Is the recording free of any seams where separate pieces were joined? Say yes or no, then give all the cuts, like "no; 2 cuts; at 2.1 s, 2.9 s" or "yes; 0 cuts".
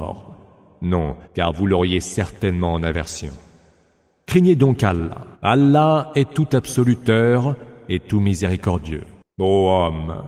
no; 2 cuts; at 1.2 s, 5.3 s